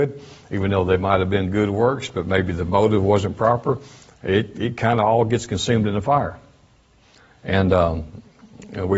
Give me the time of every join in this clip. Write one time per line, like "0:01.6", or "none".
none